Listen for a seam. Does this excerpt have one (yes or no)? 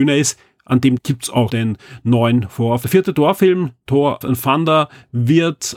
yes